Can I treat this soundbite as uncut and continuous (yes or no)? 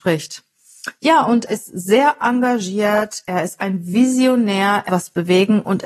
no